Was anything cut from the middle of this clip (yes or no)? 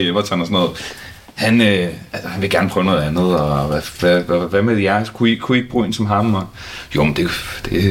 no